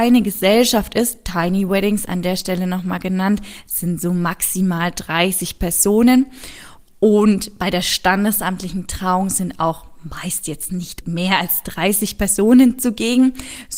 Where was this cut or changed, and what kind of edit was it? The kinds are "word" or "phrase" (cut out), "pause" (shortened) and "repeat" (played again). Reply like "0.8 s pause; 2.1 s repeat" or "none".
11.0 s word